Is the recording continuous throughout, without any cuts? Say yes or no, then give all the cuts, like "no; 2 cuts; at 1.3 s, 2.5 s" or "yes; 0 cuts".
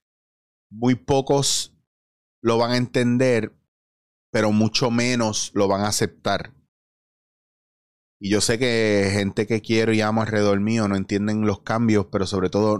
yes; 0 cuts